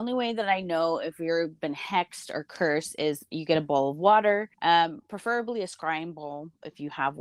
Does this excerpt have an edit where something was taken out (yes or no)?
yes